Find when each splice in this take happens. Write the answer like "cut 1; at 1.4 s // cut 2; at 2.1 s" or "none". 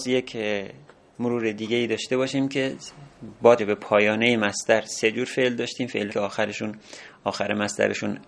cut 1; at 3.6 s // cut 2; at 6.1 s